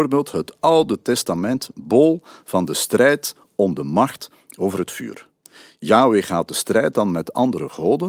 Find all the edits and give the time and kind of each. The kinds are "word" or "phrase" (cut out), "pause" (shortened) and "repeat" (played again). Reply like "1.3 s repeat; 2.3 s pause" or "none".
none